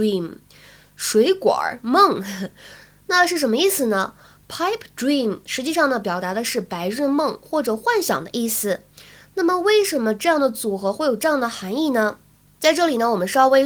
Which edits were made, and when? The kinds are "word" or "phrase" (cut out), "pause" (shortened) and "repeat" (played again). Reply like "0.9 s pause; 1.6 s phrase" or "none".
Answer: none

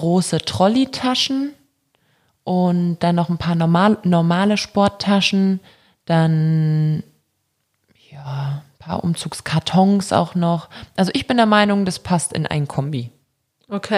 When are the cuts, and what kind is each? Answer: none

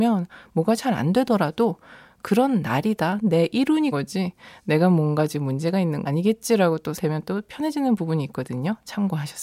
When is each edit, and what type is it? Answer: 3.9 s word; 6.0 s word; 6.9 s word

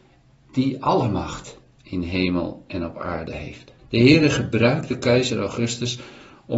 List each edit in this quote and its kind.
3.8 s pause

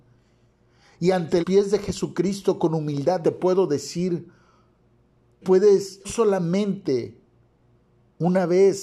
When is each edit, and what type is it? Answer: 1.4 s word; 3.2 s word; 5.4 s word; 6.0 s word

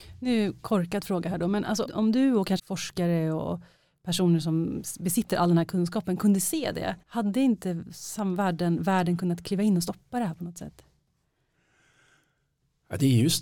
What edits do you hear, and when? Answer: 1.8 s word; 2.6 s word; 7.0 s pause

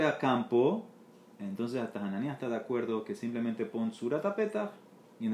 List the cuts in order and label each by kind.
none

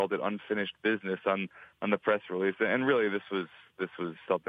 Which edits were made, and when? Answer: none

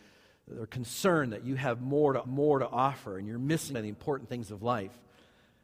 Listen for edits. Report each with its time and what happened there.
2.2 s repeat; 3.7 s word

